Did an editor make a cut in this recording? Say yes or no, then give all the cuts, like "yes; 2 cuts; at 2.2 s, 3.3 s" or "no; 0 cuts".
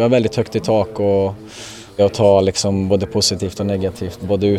yes; 1 cut; at 2.0 s